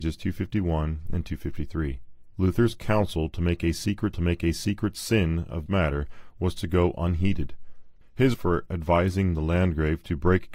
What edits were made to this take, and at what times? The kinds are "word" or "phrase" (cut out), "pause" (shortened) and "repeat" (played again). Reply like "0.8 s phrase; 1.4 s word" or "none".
2.3 s pause; 4.1 s repeat; 5.7 s word; 8.3 s word